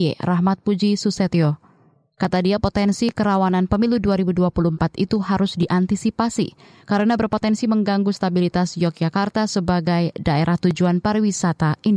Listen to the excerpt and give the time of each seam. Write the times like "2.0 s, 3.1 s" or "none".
none

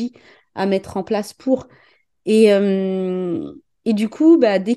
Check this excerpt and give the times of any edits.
none

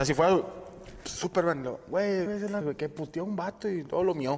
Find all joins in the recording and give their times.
2.3 s, 2.6 s

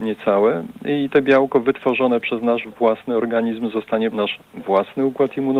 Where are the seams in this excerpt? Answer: 4.1 s

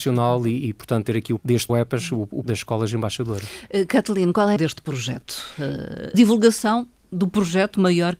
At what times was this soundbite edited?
1.4 s, 1.7 s, 2.4 s, 4.6 s, 6.1 s

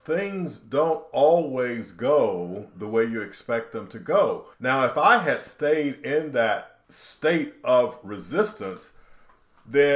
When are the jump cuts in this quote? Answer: 4.5 s, 6.8 s

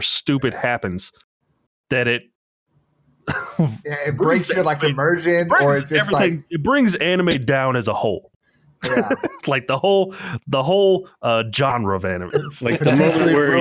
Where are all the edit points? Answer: 12.3 s

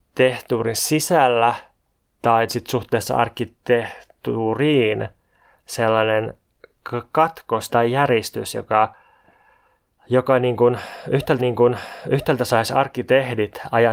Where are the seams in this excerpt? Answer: 2.5 s, 7.7 s, 11.4 s

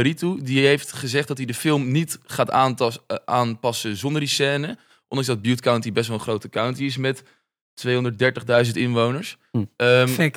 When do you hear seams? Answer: none

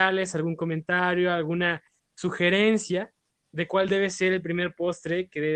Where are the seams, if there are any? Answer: none

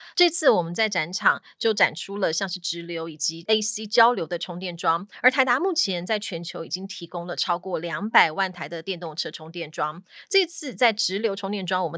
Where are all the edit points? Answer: none

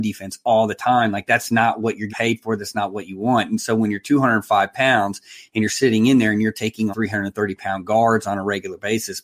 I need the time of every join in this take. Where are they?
2.1 s, 6.9 s

